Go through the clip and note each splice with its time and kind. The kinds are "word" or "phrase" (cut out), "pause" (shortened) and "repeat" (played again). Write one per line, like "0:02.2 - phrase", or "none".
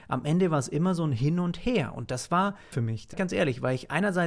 0:02.7 - word
0:03.1 - word